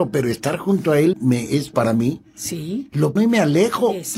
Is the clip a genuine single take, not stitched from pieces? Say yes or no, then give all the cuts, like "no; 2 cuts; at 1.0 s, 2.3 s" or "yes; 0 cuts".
no; 3 cuts; at 1.1 s, 1.7 s, 3.2 s